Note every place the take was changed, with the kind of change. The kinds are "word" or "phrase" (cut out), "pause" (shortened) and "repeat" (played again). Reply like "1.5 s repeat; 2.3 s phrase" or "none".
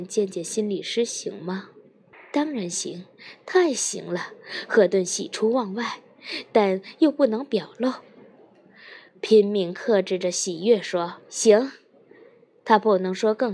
2.1 s pause; 9.1 s pause; 11.2 s pause